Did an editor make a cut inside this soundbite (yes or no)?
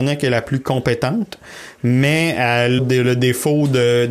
yes